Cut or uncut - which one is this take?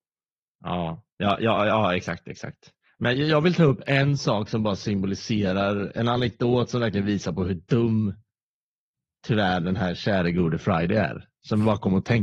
uncut